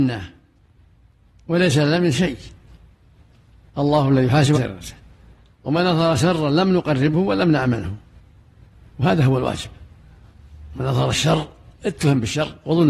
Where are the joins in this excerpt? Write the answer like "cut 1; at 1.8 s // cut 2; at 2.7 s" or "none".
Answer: cut 1; at 2.1 s // cut 2; at 4.5 s